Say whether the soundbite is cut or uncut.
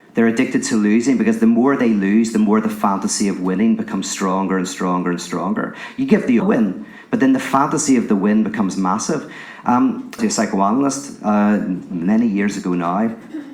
cut